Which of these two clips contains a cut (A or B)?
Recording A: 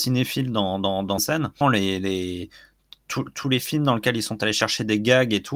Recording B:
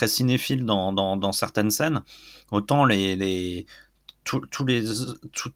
A